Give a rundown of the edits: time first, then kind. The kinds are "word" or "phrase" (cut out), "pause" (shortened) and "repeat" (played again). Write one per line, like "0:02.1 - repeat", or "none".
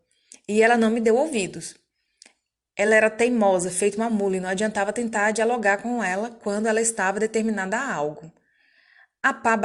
none